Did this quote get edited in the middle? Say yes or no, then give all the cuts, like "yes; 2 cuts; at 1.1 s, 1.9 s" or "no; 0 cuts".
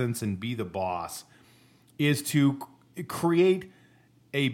no; 0 cuts